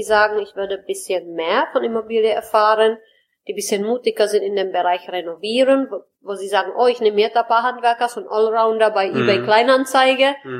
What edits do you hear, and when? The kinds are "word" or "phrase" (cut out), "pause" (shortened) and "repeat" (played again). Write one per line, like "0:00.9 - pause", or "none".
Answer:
none